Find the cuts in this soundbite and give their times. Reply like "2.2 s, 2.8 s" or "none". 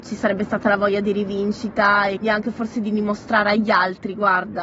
2.2 s